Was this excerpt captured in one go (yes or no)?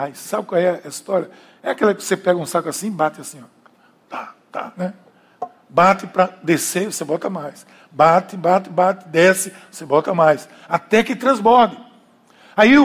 yes